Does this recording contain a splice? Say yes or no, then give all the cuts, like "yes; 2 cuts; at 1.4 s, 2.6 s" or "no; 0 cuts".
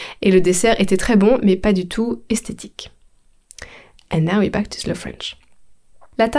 no; 0 cuts